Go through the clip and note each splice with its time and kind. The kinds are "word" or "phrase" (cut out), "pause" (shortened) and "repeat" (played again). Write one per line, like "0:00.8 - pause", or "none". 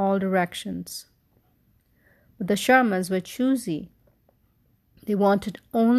none